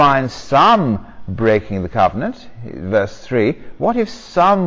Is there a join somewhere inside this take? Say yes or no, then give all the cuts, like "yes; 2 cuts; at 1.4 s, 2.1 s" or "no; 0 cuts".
no; 0 cuts